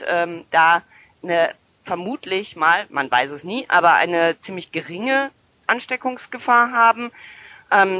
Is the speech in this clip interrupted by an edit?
no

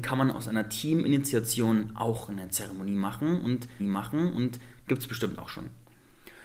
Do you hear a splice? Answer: yes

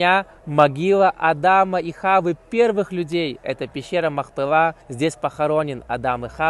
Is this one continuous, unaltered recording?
no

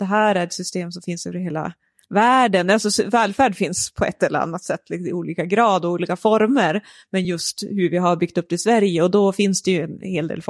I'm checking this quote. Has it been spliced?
no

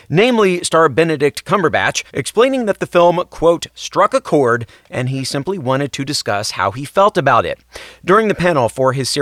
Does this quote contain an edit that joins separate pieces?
yes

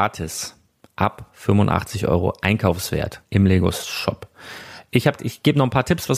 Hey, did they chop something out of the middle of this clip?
yes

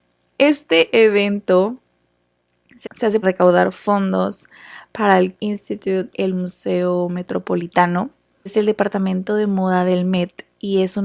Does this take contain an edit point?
yes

